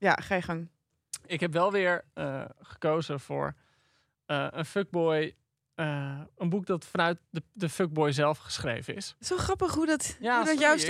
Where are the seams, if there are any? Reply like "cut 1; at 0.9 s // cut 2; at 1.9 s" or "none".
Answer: cut 1; at 2.1 s